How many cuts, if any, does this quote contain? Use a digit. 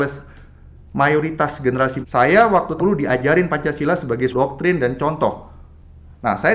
3